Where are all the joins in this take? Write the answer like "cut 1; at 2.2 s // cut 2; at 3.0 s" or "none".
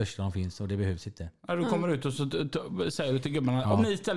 none